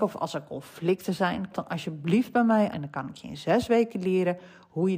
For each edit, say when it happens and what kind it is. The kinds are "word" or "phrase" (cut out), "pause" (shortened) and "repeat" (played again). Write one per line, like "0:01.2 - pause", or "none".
0:01.5 - word
0:02.7 - word

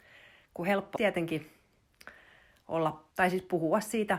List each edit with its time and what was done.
0:01.0 - word
0:03.1 - pause

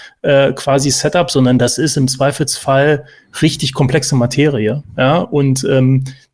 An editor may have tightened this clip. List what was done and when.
none

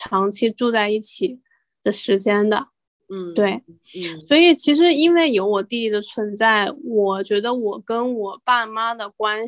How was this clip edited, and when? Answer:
none

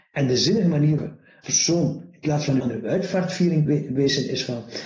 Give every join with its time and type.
0:01.0 - word
0:01.4 - word
0:02.6 - word
0:03.7 - word

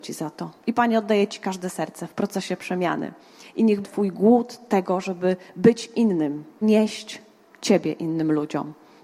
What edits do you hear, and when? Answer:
0:03.8 - word
0:06.6 - word

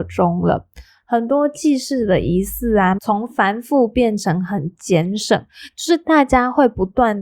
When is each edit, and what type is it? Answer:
0:03.0 - phrase

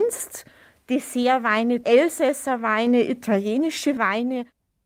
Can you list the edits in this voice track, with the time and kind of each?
0:01.8 - word

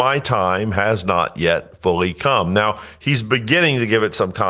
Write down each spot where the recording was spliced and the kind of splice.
none

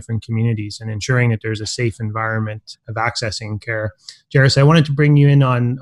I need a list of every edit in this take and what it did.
0:02.7 - word

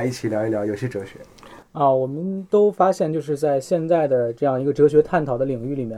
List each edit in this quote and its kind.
0:01.7 - pause

